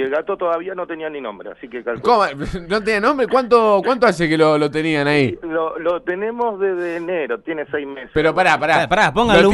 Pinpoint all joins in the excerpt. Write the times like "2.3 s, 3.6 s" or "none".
none